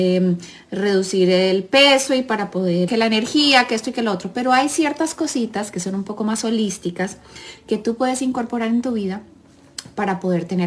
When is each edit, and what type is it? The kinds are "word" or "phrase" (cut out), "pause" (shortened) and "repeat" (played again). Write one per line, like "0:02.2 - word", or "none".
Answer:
0:02.9 - word

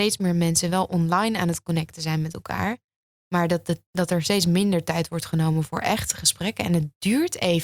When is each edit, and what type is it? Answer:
none

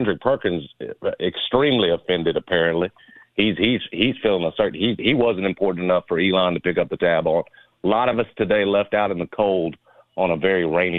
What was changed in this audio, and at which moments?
none

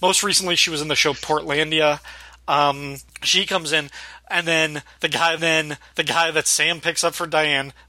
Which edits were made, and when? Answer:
0:05.4 - repeat

